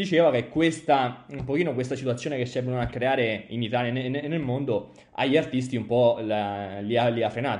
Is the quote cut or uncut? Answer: uncut